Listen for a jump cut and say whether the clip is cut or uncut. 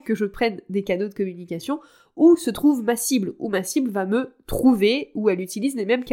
uncut